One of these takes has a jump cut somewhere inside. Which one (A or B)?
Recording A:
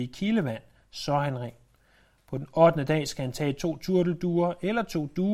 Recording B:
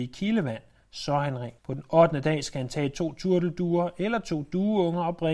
B